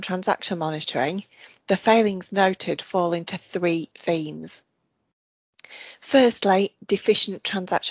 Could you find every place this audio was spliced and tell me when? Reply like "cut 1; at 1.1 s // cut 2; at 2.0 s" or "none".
none